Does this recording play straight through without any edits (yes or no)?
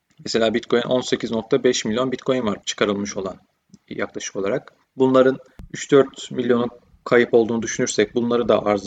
no